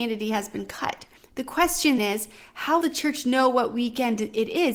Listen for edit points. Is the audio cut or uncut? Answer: cut